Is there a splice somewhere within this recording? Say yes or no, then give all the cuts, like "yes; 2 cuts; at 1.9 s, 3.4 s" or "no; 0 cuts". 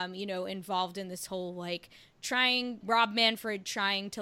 yes; 1 cut; at 2.8 s